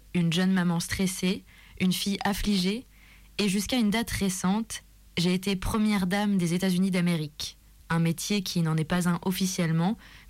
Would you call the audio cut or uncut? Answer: uncut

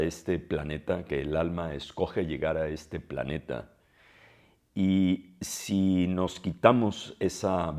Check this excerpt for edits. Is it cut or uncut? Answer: uncut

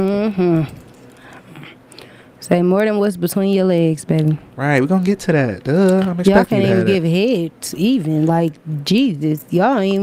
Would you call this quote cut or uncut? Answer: uncut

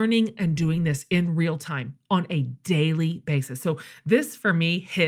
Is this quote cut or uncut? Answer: uncut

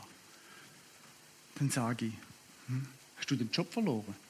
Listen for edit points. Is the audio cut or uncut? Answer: uncut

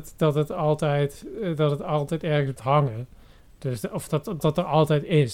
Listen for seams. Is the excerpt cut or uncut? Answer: cut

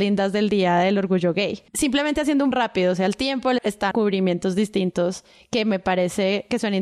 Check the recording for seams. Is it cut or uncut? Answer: cut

